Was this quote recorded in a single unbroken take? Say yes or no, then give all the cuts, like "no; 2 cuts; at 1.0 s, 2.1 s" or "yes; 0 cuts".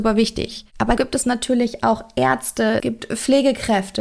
no; 2 cuts; at 1.0 s, 2.8 s